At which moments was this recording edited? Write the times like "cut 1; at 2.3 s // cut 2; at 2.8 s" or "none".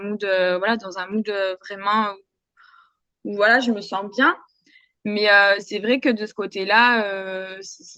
none